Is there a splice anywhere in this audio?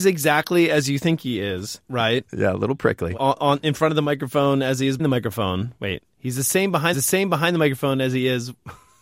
yes; 4 cuts; at 3.2 s, 5.0 s, 6.1 s, 6.9 s

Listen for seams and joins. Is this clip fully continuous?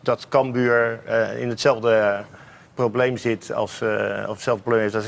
yes; 0 cuts

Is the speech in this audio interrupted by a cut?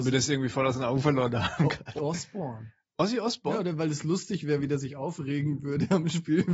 yes; 1 cut; at 2.0 s

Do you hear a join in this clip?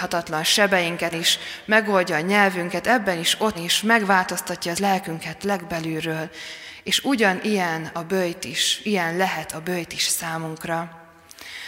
yes; 4 cuts; at 1.1 s, 3.5 s, 4.7 s, 8.8 s

